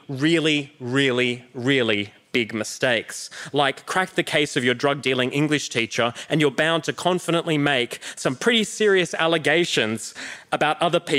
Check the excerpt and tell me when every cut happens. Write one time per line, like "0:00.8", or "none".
none

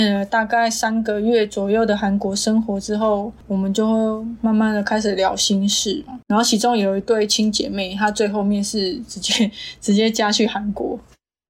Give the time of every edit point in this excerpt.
0:06.2

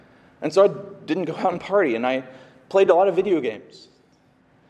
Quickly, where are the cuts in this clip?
none

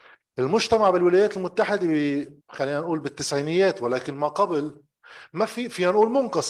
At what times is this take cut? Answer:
0:02.4

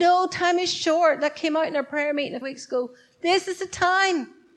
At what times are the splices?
0:02.4

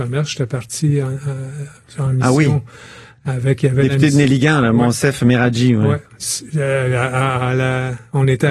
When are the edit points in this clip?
none

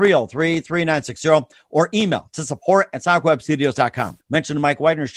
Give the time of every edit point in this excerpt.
0:04.2

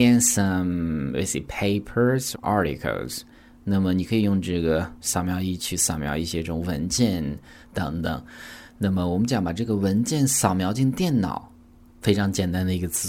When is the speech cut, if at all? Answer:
0:02.3
0:05.0

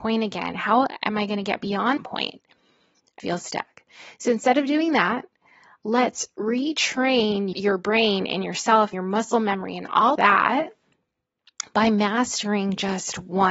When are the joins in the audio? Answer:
0:02.0
0:03.2
0:07.5
0:08.9
0:10.2

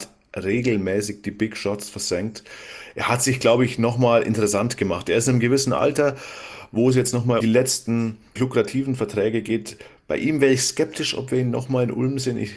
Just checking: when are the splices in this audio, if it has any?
0:07.4
0:08.4

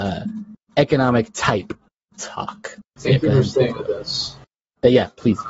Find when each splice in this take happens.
0:02.9

